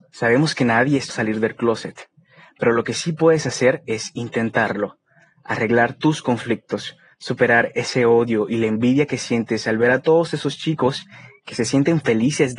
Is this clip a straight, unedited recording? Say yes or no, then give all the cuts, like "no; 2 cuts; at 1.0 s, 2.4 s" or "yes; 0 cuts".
no; 1 cut; at 1.1 s